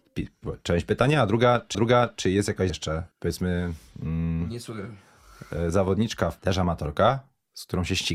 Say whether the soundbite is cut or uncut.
cut